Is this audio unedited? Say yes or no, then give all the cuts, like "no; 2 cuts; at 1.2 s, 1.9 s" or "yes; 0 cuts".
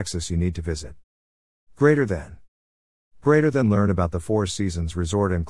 yes; 0 cuts